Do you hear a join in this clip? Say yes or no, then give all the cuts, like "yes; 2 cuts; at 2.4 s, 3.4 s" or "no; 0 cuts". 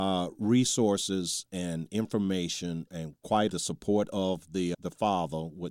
yes; 3 cuts; at 2.9 s, 3.5 s, 4.7 s